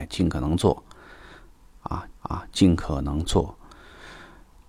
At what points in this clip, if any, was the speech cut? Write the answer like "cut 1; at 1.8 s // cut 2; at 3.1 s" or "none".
cut 1; at 2.1 s